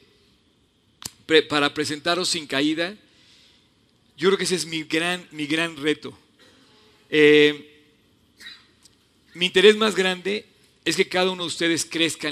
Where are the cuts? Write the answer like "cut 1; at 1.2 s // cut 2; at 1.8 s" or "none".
none